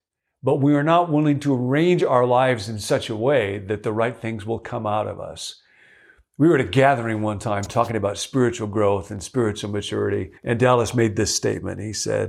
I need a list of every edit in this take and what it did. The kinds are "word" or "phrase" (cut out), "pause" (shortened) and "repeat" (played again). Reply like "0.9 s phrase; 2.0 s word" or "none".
10.4 s pause